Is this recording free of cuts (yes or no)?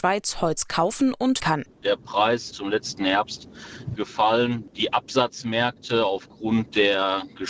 no